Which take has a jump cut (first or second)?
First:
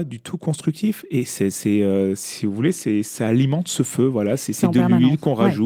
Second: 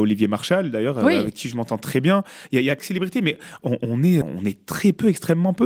second